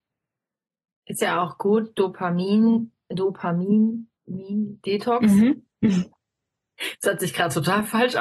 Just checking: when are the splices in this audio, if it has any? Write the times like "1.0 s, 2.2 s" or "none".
4.2 s, 5.7 s